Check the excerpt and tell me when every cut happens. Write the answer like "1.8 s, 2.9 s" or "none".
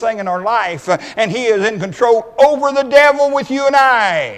none